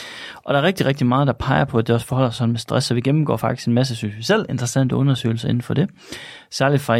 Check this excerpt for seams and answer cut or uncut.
uncut